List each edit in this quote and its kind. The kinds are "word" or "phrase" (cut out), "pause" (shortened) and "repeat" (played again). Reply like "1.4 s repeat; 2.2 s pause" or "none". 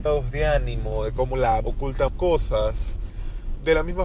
1.6 s word; 2.1 s word